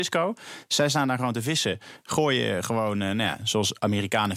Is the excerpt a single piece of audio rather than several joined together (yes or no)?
yes